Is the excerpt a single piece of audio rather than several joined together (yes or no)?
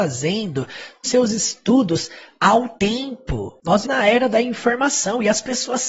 no